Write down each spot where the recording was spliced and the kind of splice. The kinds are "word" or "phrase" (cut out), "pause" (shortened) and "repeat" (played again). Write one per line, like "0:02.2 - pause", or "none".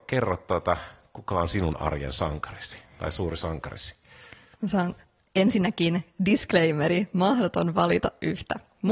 none

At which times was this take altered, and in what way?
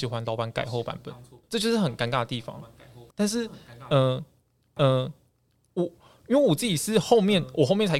0:01.4 - pause
0:03.1 - pause
0:04.8 - repeat

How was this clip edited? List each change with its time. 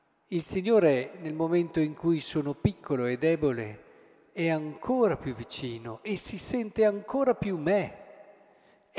none

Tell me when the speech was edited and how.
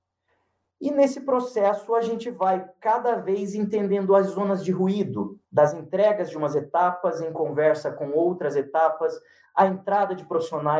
0:05.4 - pause

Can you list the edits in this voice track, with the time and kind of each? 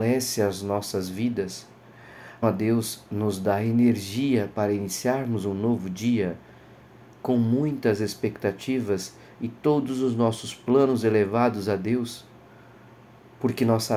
0:02.4 - word

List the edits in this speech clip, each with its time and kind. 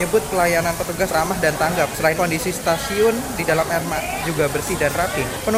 0:01.1 - word
0:02.2 - word
0:03.4 - word
0:04.2 - word

